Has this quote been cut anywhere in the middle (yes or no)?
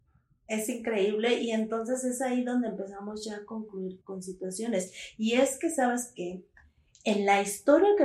yes